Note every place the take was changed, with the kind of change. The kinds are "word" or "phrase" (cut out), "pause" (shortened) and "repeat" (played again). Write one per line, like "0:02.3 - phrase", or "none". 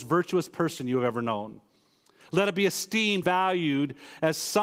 0:03.2 - word